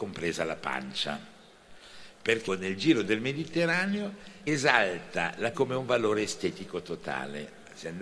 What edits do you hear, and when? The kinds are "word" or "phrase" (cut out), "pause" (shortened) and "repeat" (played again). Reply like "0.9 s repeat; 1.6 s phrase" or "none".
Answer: 2.5 s phrase; 4.5 s word; 5.5 s word

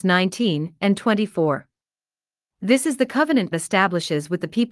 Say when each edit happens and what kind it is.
3.5 s word

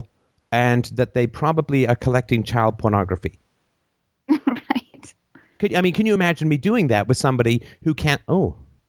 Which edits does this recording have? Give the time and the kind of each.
none

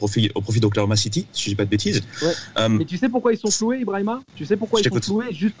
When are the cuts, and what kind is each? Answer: 4.2 s pause

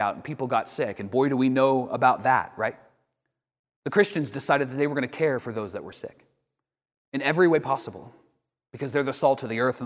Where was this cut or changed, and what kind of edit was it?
none

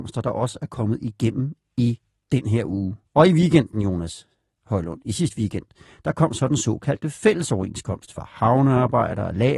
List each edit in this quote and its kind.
3.1 s pause

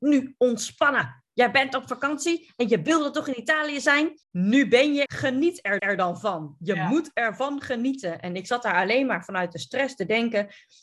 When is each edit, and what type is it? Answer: 4.2 s pause; 5.1 s word; 5.8 s repeat

